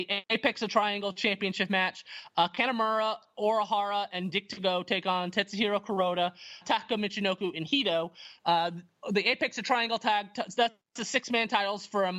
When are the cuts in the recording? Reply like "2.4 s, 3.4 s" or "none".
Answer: 6.6 s